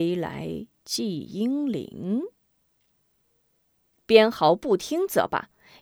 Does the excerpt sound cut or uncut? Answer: uncut